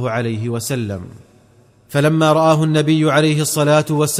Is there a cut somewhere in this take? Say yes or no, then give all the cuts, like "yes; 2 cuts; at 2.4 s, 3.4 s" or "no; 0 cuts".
no; 0 cuts